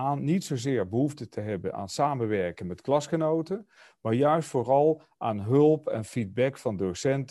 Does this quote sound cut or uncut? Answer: uncut